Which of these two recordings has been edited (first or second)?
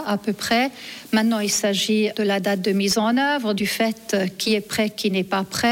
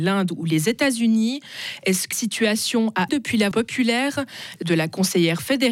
second